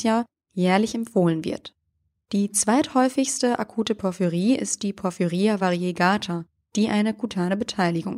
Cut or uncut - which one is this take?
uncut